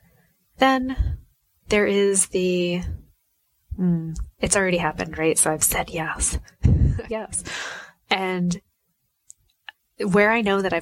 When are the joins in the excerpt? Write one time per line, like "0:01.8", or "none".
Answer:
0:04.3
0:07.1